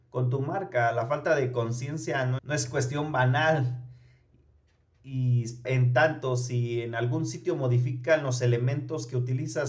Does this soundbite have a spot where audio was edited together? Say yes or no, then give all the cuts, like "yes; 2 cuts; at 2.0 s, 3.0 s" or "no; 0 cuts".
yes; 2 cuts; at 2.4 s, 5.6 s